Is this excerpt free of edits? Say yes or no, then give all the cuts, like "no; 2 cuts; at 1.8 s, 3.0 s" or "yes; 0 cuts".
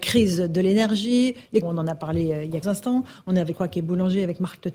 no; 3 cuts; at 1.6 s, 2.6 s, 3.5 s